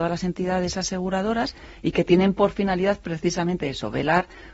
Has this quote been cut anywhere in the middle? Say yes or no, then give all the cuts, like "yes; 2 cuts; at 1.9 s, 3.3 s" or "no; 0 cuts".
no; 0 cuts